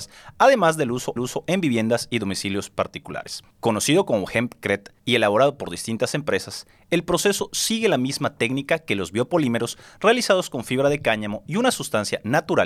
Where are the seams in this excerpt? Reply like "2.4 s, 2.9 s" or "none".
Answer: 1.2 s, 3.5 s, 5.0 s